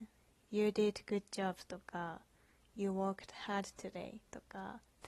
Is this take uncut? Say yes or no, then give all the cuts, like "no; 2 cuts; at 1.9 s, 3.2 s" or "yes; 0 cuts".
yes; 0 cuts